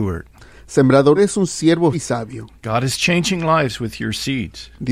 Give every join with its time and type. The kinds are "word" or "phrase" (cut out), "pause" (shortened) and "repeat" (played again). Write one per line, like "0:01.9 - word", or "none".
0:01.2 - word
0:01.9 - word